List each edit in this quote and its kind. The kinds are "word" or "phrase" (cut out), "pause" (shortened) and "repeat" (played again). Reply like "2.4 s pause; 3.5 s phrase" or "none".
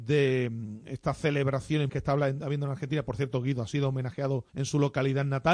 1.9 s word; 4.5 s pause